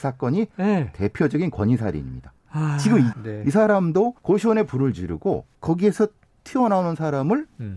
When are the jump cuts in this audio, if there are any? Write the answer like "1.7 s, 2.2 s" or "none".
3.1 s, 4.2 s, 5.5 s